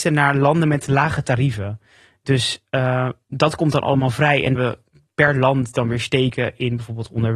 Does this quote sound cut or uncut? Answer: cut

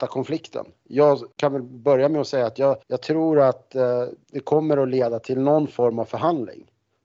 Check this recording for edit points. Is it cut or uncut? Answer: cut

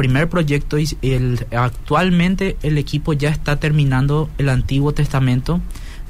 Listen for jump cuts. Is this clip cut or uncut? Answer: uncut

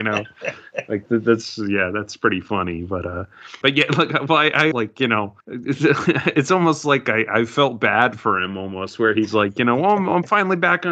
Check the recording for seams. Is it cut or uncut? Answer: cut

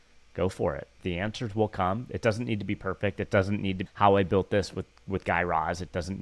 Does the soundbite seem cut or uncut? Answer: cut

